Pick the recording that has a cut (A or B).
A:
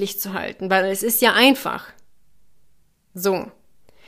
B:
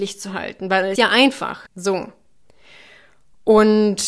B